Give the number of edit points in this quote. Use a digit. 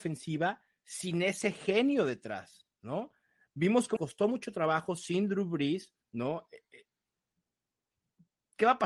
3